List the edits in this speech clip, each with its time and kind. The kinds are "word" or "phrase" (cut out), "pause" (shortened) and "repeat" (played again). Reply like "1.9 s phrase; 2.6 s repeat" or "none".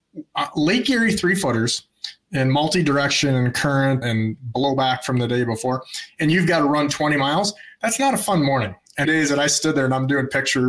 4.0 s word; 9.0 s phrase